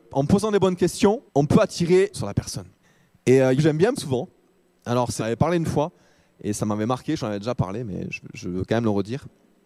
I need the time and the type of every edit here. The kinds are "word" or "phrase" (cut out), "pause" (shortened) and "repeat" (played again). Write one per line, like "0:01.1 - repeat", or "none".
0:01.3 - pause
0:02.1 - word
0:02.8 - pause
0:03.6 - phrase
0:04.0 - word
0:05.2 - phrase
0:07.2 - phrase